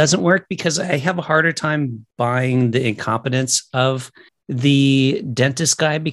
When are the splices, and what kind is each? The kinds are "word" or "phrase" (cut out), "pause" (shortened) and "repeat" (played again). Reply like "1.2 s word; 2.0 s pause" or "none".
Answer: 2.1 s pause; 4.3 s pause